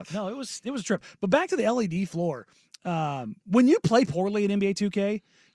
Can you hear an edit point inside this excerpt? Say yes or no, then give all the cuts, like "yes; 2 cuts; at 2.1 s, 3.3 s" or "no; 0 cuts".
no; 0 cuts